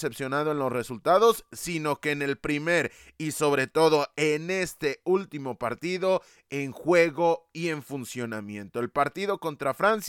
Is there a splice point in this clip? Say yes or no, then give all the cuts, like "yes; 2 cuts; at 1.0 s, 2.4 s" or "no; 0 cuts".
no; 0 cuts